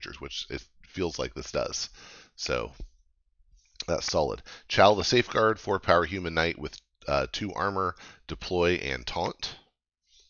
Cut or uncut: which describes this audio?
uncut